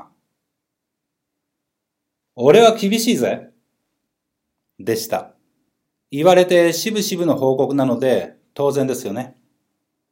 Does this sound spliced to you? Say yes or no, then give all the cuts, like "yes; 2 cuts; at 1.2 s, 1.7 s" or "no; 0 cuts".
yes; 1 cut; at 5.8 s